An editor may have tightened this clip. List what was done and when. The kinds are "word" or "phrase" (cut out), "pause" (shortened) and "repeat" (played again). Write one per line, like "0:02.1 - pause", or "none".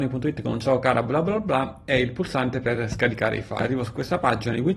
none

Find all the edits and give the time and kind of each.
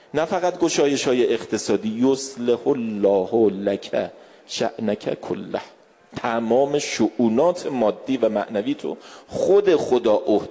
none

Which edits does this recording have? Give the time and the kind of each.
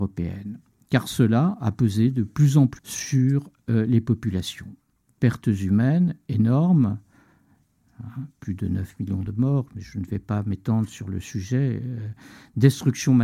0:02.8 - word

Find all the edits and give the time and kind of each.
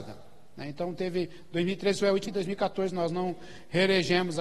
0:02.3 - word

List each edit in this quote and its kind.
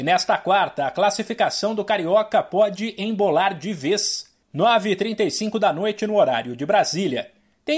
0:04.4 - pause

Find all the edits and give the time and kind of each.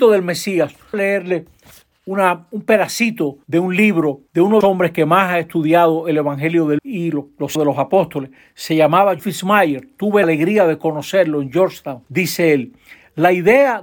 0:00.9 - phrase
0:03.4 - pause
0:04.3 - pause
0:04.6 - phrase
0:06.8 - word
0:07.6 - word
0:09.2 - word
0:10.2 - word
0:12.1 - pause

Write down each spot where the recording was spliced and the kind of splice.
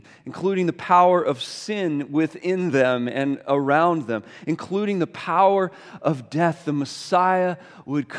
none

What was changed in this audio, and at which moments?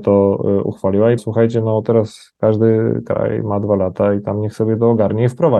0:01.2 - word

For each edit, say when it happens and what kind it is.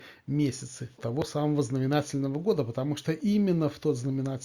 0:01.0 - word

